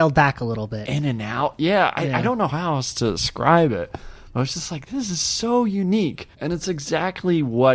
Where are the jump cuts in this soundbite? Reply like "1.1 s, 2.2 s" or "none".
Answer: 6.3 s